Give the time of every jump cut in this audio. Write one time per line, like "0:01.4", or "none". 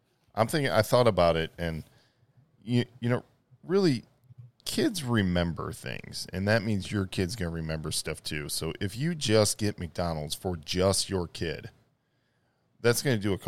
none